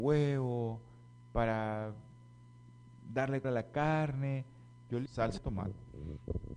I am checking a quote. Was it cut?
yes; 3 cuts; at 3.4 s, 5.1 s, 5.4 s

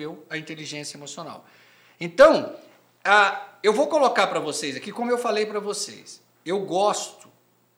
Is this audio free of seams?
yes; 0 cuts

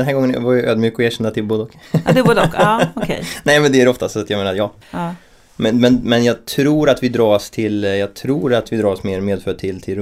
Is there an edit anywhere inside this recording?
yes; 1 cut; at 4.8 s

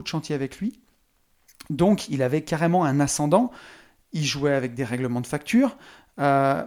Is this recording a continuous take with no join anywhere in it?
yes; 0 cuts

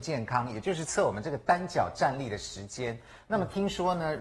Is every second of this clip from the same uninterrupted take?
yes; 0 cuts

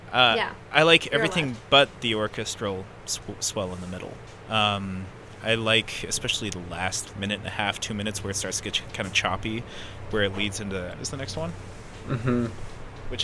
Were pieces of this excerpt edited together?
yes; 2 cuts; at 7.1 s, 10.9 s

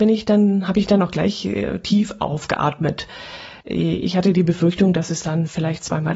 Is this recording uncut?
no; 1 cut; at 3.6 s

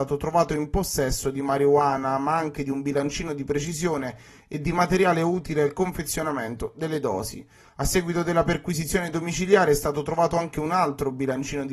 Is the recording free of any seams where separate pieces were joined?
yes; 0 cuts

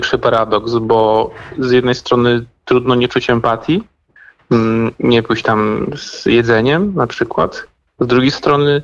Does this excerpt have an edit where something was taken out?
no; 0 cuts

